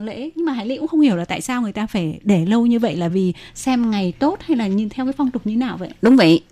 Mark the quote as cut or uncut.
uncut